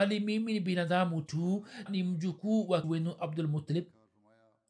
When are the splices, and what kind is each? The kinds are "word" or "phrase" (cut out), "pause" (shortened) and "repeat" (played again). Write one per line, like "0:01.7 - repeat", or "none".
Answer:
0:01.9 - word
0:02.8 - word